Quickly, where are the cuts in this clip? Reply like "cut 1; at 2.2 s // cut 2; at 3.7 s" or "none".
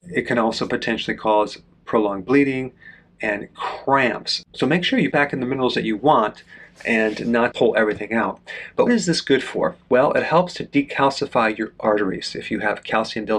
cut 1; at 5.1 s // cut 2; at 7.5 s // cut 3; at 8.9 s